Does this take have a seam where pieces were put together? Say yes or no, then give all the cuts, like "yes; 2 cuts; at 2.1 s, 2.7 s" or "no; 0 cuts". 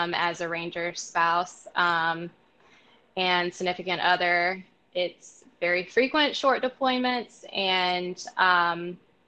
no; 0 cuts